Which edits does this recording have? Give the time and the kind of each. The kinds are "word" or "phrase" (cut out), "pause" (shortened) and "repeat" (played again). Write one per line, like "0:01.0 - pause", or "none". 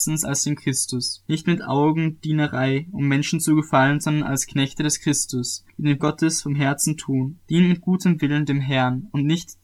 0:01.2 - pause
0:05.7 - pause
0:06.0 - word
0:07.4 - pause